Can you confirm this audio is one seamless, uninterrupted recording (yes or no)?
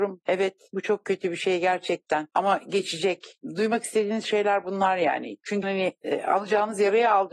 no